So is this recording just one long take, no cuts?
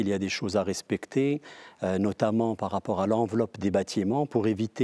yes; 0 cuts

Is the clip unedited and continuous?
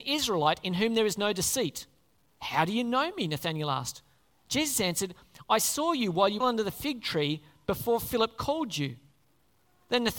no; 1 cut; at 6.4 s

